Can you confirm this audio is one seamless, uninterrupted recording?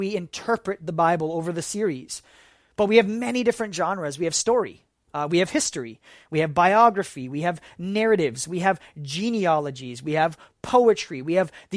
yes; 0 cuts

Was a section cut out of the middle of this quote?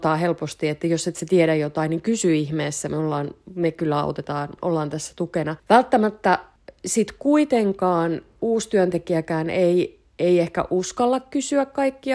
yes; 2 cuts; at 4.6 s, 5.6 s

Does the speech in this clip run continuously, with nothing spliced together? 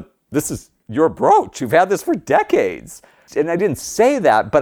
yes; 0 cuts

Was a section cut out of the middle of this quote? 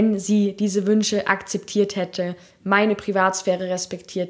no; 0 cuts

